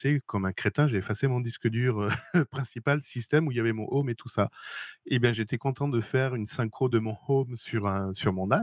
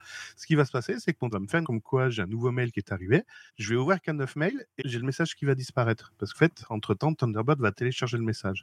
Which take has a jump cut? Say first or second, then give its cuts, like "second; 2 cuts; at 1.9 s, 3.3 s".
second; 5 cuts; at 1.3 s, 1.6 s, 3.5 s, 4.8 s, 6.3 s